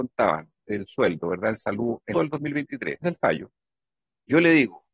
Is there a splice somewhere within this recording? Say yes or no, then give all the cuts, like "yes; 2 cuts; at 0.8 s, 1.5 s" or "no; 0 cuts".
yes; 2 cuts; at 2.1 s, 3.0 s